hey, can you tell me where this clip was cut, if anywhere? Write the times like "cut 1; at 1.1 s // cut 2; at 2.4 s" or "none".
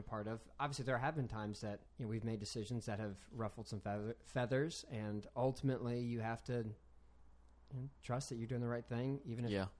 cut 1; at 1.9 s